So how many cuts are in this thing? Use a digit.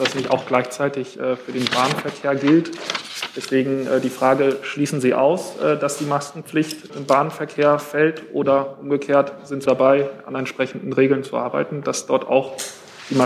2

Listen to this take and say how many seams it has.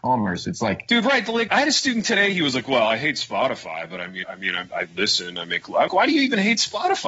3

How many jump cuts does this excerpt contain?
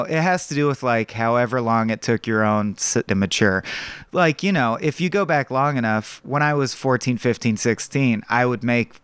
1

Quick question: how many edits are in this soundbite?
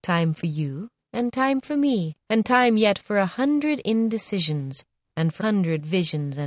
2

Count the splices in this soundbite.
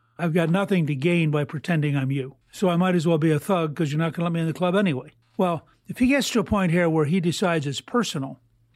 2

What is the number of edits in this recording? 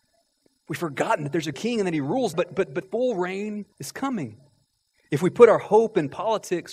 5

